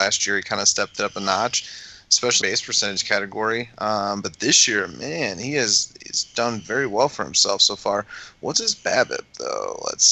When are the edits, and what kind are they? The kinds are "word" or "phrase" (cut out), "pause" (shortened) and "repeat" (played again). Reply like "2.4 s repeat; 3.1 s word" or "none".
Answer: 2.4 s phrase